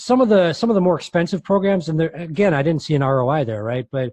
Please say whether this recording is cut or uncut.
uncut